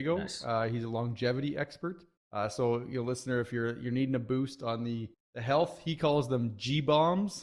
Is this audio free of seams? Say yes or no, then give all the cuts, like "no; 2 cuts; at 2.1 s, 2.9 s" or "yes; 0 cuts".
no; 2 cuts; at 2.2 s, 5.1 s